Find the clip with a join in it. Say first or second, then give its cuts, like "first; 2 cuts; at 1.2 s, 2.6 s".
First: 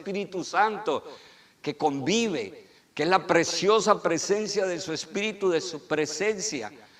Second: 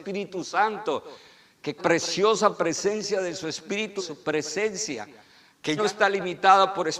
second; 3 cuts; at 1.8 s, 4.0 s, 5.8 s